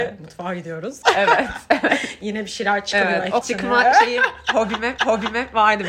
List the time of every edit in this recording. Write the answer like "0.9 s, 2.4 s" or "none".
3.4 s, 5.0 s